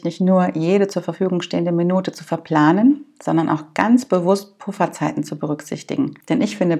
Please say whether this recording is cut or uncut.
uncut